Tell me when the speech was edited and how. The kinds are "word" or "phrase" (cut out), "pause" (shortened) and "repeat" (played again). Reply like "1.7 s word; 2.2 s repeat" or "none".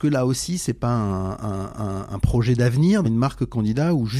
1.7 s repeat; 3.0 s word